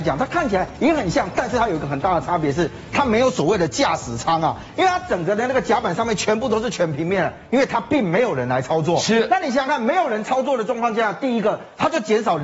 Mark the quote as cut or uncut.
uncut